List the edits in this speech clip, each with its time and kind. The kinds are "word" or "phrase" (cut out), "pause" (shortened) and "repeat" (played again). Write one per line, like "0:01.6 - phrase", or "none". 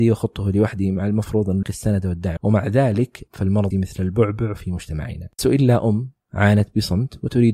0:01.6 - word
0:02.4 - word
0:03.3 - word
0:03.7 - word
0:05.4 - word